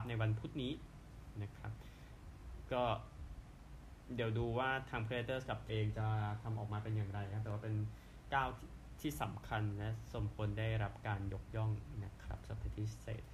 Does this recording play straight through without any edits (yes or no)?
no